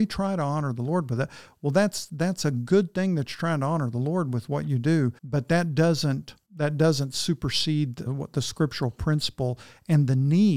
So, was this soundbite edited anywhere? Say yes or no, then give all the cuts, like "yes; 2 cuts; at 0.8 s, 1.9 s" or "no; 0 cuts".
yes; 3 cuts; at 5.2 s, 6.4 s, 8.1 s